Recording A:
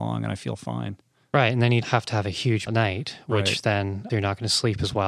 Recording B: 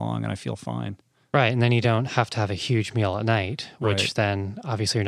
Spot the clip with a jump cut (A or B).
A